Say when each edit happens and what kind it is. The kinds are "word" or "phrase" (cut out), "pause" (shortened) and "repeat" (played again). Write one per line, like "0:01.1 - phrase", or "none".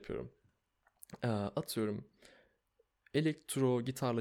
none